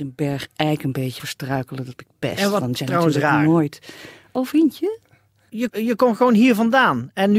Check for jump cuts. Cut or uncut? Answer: cut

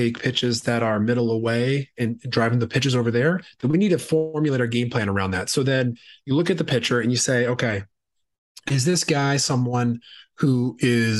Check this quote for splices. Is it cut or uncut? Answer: uncut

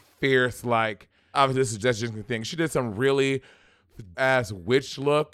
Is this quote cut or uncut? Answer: cut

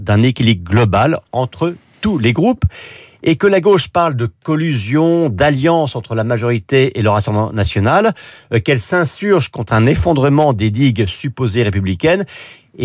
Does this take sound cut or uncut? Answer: uncut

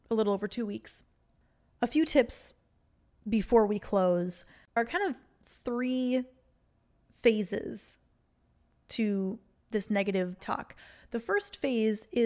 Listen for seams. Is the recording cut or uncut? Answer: cut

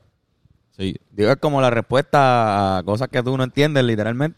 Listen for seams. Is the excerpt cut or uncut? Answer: uncut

